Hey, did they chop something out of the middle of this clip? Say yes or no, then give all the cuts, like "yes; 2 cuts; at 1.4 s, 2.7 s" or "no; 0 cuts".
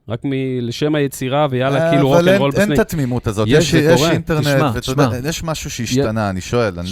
no; 0 cuts